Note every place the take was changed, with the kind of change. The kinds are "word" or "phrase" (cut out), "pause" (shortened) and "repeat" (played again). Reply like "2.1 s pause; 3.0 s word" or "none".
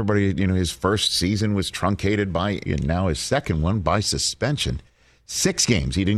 2.7 s word